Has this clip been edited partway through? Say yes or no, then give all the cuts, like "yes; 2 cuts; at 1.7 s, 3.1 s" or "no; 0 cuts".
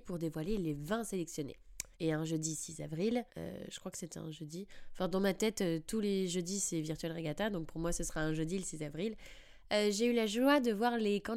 yes; 2 cuts; at 1.9 s, 3.3 s